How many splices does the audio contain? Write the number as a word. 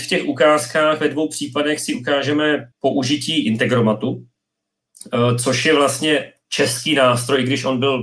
one